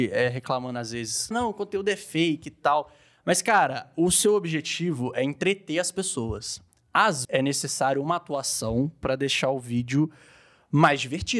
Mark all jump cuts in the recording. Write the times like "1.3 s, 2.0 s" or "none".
1.3 s, 7.2 s